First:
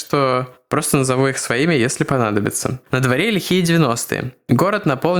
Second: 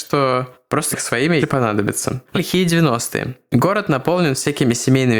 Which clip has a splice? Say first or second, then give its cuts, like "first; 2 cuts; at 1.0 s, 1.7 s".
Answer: second; 3 cuts; at 0.9 s, 1.4 s, 2.3 s